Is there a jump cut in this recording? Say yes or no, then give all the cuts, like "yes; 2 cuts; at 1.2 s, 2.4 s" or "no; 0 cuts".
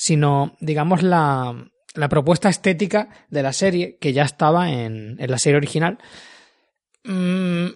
no; 0 cuts